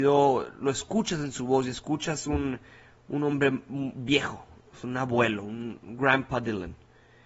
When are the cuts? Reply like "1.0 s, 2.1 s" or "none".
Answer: none